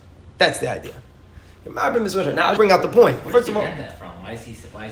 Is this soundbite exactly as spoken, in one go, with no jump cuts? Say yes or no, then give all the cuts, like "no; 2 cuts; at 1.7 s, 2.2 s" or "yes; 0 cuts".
no; 1 cut; at 2.6 s